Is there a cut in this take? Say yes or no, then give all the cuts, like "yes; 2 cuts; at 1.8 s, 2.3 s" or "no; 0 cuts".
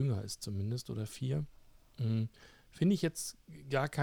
no; 0 cuts